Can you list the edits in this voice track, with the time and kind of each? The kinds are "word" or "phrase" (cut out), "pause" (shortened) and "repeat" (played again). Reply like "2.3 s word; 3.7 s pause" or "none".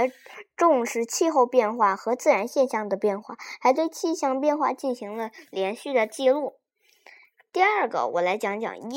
none